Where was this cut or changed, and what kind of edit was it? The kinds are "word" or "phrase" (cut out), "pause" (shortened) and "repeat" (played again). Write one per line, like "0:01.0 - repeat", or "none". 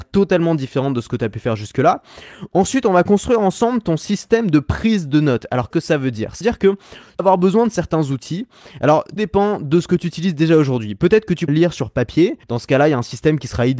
0:05.7 - word
0:06.4 - word
0:07.2 - word
0:09.2 - word
0:11.5 - word
0:12.4 - pause